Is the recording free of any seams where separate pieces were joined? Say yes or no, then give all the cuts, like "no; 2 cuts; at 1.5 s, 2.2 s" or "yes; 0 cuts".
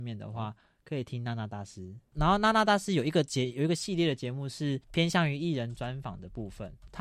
no; 1 cut; at 4.8 s